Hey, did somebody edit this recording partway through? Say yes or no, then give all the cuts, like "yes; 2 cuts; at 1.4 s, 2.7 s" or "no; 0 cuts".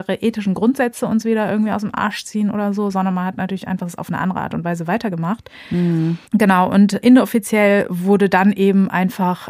yes; 2 cuts; at 6.2 s, 7.0 s